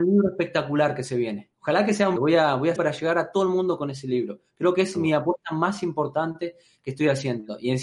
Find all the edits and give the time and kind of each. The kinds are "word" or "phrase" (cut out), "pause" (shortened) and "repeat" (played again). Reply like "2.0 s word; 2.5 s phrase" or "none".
2.2 s word; 2.8 s phrase